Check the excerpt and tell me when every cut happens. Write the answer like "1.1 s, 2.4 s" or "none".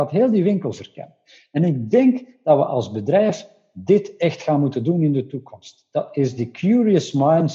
none